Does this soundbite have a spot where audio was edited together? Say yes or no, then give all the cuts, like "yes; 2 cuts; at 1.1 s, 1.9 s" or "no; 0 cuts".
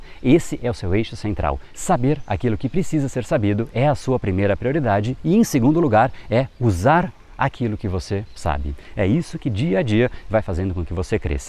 no; 0 cuts